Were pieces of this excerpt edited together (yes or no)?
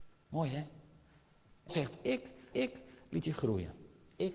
yes